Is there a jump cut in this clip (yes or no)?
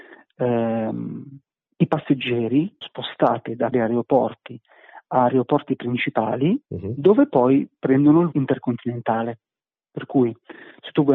yes